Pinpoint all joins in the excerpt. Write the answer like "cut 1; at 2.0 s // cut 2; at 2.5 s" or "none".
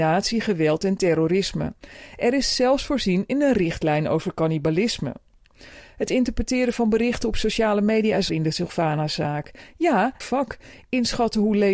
cut 1; at 8.3 s // cut 2; at 10.2 s